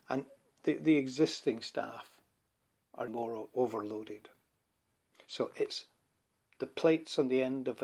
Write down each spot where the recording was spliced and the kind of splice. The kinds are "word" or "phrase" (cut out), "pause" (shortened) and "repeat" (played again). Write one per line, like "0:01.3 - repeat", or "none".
0:03.1 - word